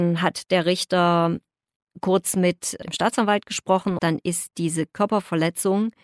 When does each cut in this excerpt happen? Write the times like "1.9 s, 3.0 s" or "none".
4.0 s